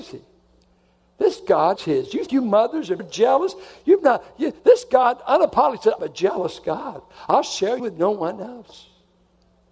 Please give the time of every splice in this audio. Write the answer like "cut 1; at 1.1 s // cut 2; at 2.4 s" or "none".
cut 1; at 1.8 s // cut 2; at 2.3 s // cut 3; at 3.0 s // cut 4; at 6.0 s // cut 5; at 7.8 s